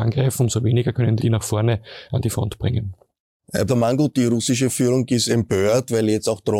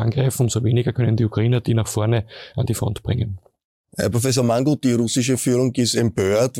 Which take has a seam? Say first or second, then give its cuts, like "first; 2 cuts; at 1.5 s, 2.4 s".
first; 2 cuts; at 1.2 s, 3.7 s